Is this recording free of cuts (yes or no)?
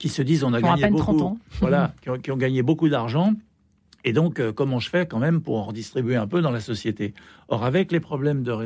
yes